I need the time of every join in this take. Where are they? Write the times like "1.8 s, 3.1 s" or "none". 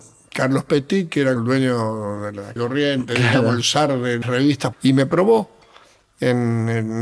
1.4 s, 2.6 s, 4.2 s, 4.7 s

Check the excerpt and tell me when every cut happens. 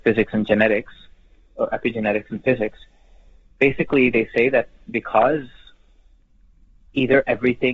none

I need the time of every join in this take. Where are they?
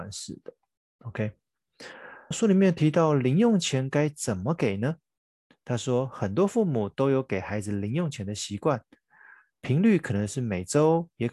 2.3 s

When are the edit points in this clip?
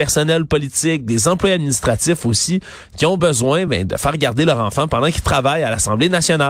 none

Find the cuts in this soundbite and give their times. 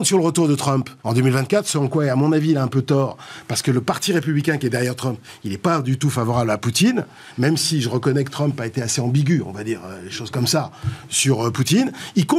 1.0 s

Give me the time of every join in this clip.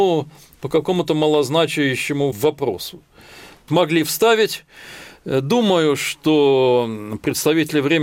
3.7 s

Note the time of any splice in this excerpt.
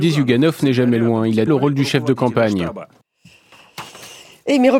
1.5 s

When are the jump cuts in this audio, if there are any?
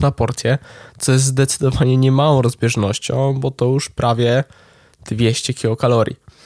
none

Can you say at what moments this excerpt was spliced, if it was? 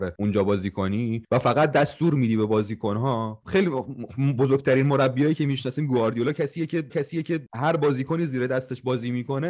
6.9 s

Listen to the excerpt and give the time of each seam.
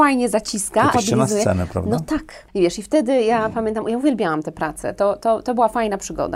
0.9 s

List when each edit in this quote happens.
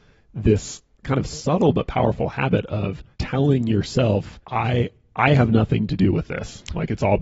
3.1 s, 4.4 s

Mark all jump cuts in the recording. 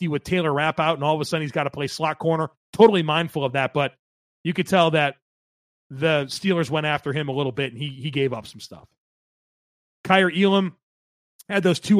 none

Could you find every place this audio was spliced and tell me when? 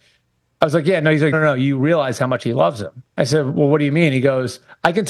1.3 s, 3.1 s

